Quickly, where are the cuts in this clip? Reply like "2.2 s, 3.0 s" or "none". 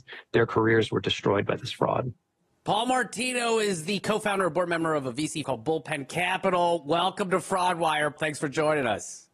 5.4 s, 8.2 s

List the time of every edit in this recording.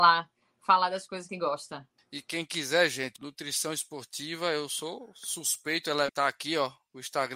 1.3 s, 2.0 s, 3.2 s, 6.1 s

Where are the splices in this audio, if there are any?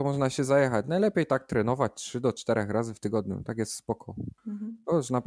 4.4 s

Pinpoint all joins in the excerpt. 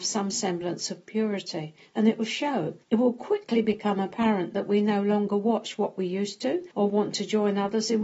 2.8 s, 6.7 s

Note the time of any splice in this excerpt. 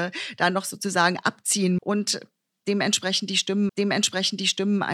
1.8 s, 3.7 s

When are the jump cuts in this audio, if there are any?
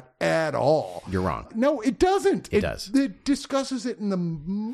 1.5 s

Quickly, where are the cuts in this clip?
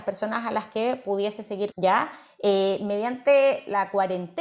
1.7 s

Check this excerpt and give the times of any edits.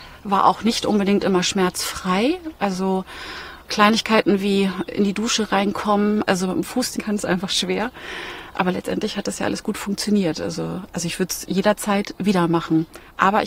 7.0 s

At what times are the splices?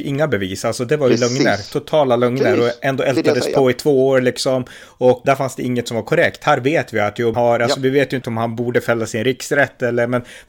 5.2 s, 7.3 s, 8.2 s

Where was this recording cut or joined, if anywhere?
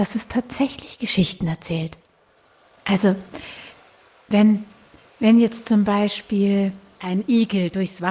none

